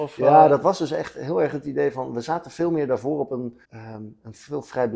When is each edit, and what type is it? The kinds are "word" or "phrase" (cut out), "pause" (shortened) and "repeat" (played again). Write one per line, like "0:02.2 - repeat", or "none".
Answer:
0:03.6 - pause